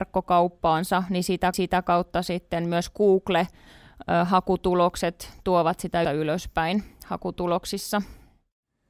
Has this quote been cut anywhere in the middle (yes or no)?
yes